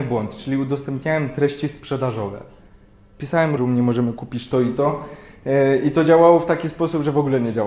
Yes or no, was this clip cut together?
yes